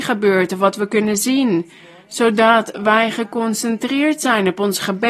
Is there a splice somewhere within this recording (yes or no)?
no